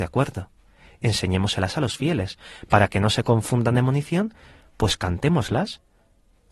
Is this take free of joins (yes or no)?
yes